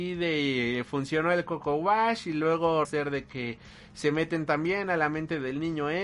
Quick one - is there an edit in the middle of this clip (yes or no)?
yes